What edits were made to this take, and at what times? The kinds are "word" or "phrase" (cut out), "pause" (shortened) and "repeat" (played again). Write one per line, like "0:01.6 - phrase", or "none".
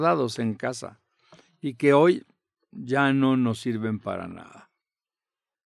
none